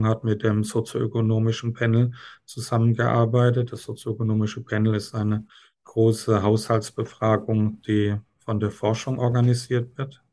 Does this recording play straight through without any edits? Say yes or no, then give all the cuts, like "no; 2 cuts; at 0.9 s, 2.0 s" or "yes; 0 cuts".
yes; 0 cuts